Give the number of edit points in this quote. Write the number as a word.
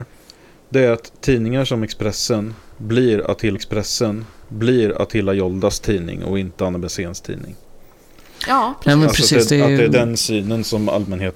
one